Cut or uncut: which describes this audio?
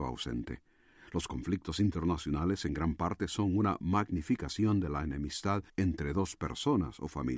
cut